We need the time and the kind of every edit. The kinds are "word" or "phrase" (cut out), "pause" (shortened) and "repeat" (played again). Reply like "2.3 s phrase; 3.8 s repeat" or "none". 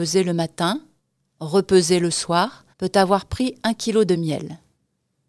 2.7 s pause

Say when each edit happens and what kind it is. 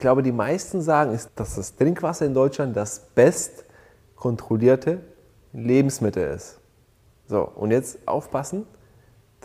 1.3 s word

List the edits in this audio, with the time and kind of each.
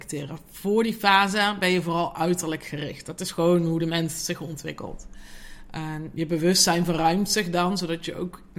none

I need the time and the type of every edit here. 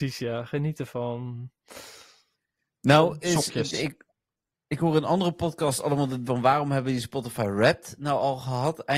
6.3 s word

